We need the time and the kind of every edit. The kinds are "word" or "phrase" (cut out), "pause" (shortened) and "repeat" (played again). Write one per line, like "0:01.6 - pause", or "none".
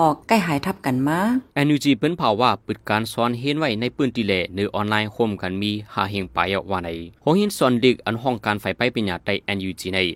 0:01.5 - pause
0:07.2 - pause